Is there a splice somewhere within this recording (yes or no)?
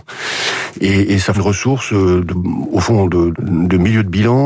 yes